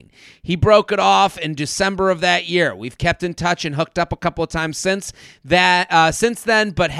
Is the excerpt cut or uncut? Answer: uncut